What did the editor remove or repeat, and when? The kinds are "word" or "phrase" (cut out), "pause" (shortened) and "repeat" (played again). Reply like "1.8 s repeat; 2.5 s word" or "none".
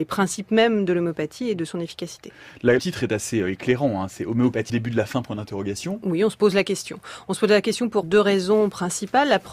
2.8 s word; 4.7 s word; 8.0 s word